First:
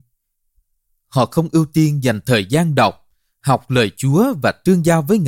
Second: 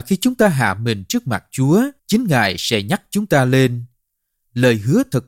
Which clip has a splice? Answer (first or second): second